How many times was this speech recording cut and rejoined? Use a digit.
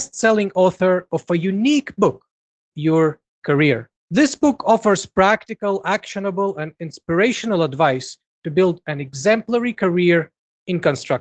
2